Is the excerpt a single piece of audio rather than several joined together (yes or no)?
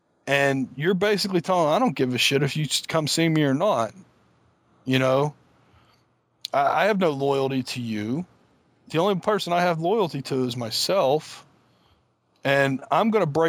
yes